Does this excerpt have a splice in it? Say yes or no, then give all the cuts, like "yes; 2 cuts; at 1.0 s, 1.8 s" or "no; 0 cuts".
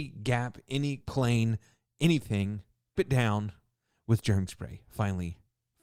yes; 3 cuts; at 1.0 s, 3.0 s, 4.5 s